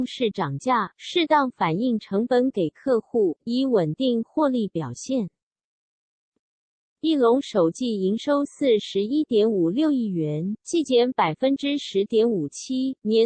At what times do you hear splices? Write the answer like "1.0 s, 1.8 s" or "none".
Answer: none